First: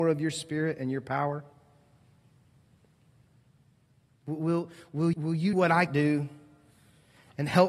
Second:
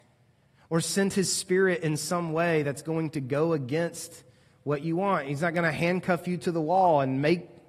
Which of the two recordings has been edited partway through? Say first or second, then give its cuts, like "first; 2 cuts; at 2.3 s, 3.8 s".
first; 3 cuts; at 5.1 s, 5.5 s, 5.9 s